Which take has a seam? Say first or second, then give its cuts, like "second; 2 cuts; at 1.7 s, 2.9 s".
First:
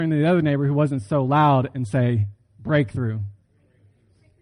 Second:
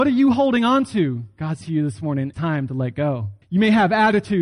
second; 3 cuts; at 1.6 s, 2.3 s, 3.4 s